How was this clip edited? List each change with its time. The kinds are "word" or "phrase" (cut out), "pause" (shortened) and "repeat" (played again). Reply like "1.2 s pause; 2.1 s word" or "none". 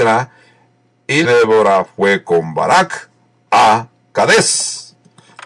1.2 s word